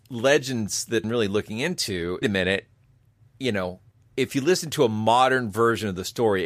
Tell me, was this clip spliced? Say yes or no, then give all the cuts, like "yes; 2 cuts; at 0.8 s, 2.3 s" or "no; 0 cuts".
yes; 3 cuts; at 1.0 s, 2.2 s, 3.9 s